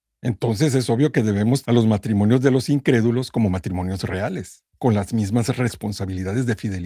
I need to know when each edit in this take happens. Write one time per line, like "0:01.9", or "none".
0:01.6
0:04.7